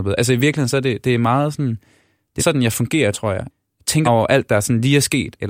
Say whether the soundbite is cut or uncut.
cut